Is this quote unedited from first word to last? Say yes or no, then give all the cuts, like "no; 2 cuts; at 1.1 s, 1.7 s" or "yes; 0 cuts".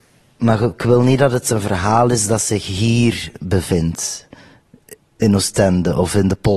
yes; 0 cuts